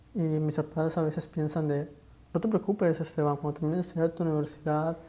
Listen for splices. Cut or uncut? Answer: uncut